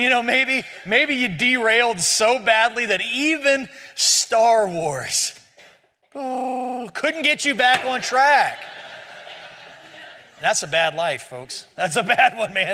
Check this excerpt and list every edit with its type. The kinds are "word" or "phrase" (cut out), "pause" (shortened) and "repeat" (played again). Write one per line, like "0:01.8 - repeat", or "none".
none